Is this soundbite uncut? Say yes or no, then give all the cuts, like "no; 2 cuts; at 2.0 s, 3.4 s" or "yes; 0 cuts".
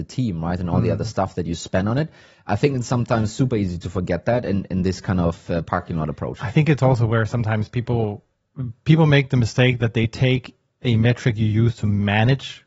yes; 0 cuts